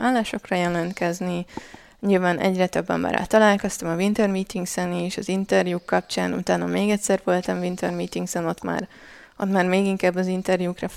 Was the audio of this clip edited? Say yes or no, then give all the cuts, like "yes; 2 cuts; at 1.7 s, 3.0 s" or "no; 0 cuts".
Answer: no; 0 cuts